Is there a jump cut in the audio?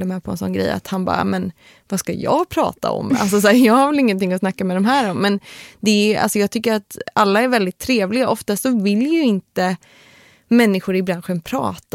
no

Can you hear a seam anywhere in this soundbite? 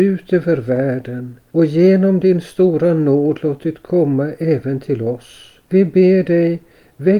yes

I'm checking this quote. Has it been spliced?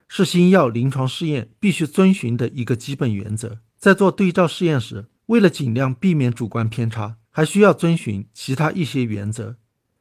yes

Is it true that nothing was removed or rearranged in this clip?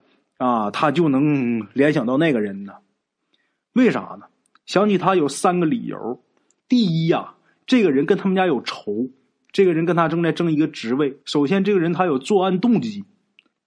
no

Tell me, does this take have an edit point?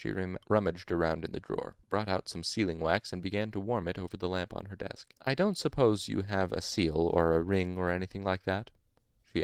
yes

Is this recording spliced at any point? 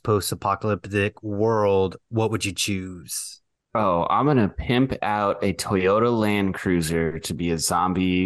no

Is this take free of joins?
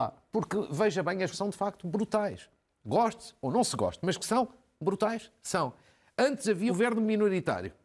no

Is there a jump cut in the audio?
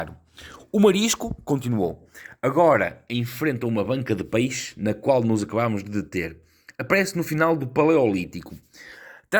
no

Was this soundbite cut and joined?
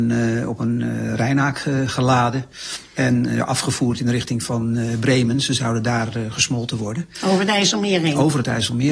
no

